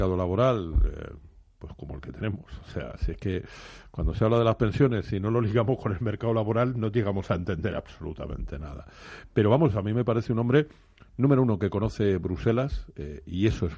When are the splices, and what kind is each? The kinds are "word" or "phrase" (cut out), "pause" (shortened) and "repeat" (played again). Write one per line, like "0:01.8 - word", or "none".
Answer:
none